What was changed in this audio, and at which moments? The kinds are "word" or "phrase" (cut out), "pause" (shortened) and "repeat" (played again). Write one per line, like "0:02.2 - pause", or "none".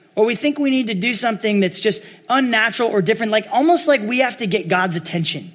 none